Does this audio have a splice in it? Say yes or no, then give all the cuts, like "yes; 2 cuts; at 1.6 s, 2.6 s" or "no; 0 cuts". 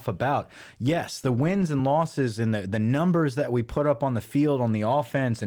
no; 0 cuts